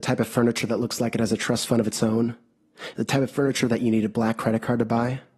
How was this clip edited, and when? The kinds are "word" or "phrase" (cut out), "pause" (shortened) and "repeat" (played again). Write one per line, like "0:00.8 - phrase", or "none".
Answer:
none